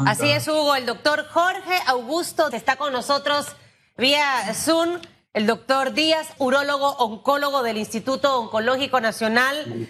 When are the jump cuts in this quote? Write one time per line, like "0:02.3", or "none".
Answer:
0:02.5
0:06.4